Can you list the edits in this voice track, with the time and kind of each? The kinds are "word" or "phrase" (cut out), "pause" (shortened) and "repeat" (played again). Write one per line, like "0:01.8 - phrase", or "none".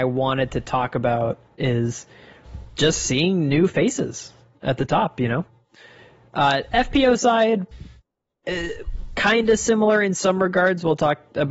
none